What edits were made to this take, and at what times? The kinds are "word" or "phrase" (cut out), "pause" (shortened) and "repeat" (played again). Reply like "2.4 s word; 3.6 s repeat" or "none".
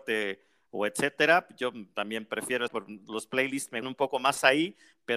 2.7 s word; 3.8 s word